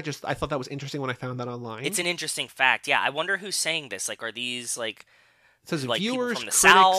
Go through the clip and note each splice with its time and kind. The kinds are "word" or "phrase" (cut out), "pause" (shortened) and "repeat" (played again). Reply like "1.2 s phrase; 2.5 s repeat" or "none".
none